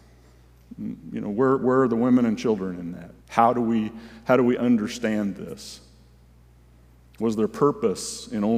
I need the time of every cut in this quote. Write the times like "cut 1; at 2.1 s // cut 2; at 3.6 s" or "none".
cut 1; at 3.2 s